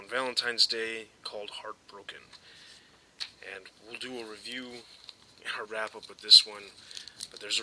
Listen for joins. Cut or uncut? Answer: cut